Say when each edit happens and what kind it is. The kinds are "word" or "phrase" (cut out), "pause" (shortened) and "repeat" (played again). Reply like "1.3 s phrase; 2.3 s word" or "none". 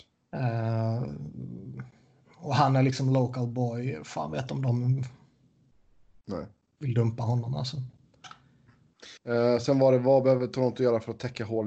9.2 s pause